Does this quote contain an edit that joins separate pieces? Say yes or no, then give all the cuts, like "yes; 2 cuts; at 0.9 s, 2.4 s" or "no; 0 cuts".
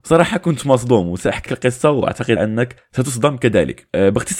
yes; 2 cuts; at 1.5 s, 2.4 s